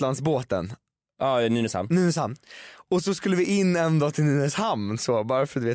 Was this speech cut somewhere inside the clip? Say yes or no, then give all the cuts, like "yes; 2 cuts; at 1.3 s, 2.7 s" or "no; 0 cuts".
no; 0 cuts